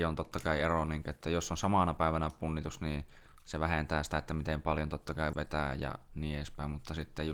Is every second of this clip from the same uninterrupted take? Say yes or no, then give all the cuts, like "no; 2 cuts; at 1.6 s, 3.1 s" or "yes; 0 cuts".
no; 1 cut; at 5.3 s